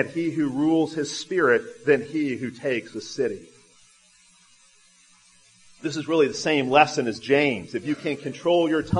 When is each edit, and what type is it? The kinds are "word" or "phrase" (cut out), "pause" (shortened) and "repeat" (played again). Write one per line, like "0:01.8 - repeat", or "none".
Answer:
none